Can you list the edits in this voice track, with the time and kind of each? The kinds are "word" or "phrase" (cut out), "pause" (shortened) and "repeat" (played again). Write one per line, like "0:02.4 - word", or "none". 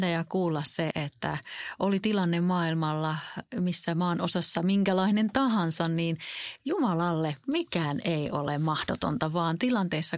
0:00.9 - word

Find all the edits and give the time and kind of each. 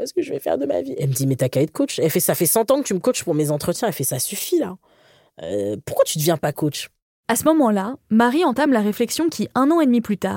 none

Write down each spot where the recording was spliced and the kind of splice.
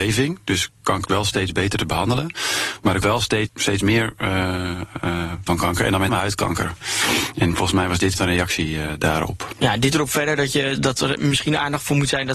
0:01.1 - word
0:03.0 - word
0:03.5 - word
0:05.5 - word
0:06.1 - word
0:08.1 - word
0:09.9 - word
0:10.8 - word

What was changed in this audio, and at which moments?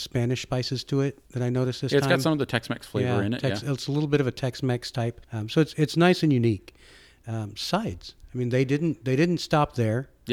0:01.3 - pause
0:05.2 - pause

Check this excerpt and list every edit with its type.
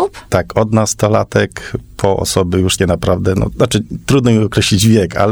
0:02.8 - word

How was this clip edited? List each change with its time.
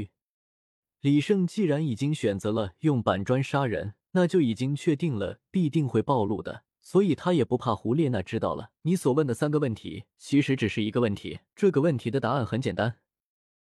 0:04.0 - pause
0:06.7 - pause
0:08.8 - pause
0:10.1 - pause
0:11.5 - pause

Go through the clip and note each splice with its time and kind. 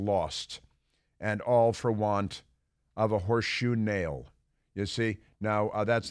none

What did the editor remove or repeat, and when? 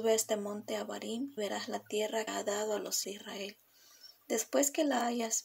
0:01.4 - word
0:02.3 - word
0:03.0 - word

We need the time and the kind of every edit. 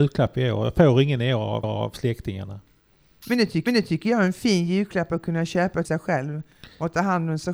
0:01.6 - repeat
0:03.7 - repeat
0:05.8 - word

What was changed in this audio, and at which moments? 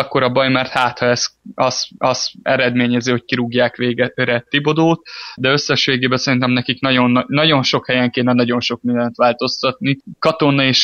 0:02.0 - repeat
0:05.4 - word

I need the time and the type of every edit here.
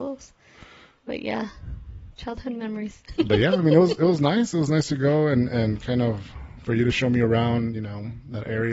none

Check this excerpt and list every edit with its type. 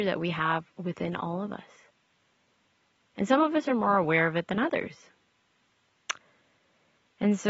none

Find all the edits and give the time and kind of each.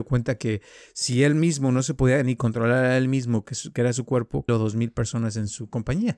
0:04.5 - phrase

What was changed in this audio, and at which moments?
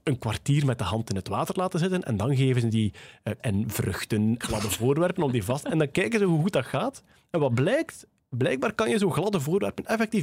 0:02.7 - word
0:03.4 - word
0:04.4 - word

